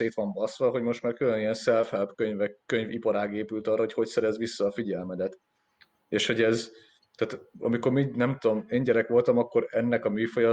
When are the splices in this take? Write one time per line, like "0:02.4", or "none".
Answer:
none